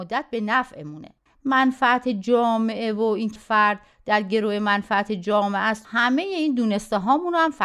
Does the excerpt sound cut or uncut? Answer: cut